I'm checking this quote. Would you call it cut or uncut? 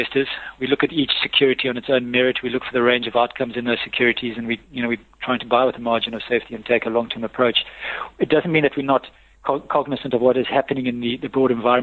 uncut